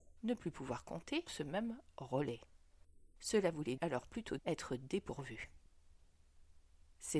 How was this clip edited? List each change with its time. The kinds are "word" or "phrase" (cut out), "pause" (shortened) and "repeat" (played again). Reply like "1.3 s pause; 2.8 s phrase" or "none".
1.3 s word; 3.8 s word; 4.4 s word